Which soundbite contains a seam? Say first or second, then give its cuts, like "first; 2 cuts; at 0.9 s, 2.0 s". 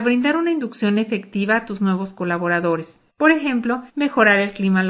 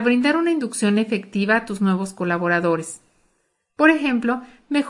first; 2 cuts; at 3.1 s, 3.9 s